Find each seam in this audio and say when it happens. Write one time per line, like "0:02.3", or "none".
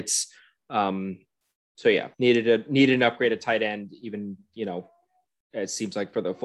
0:02.1